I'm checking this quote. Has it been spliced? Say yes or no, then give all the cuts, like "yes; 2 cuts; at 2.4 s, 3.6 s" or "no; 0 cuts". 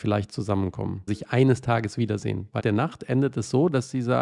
yes; 2 cuts; at 1.1 s, 2.6 s